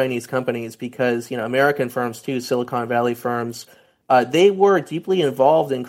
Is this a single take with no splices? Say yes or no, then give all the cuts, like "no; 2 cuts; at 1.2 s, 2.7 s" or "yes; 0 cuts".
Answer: yes; 0 cuts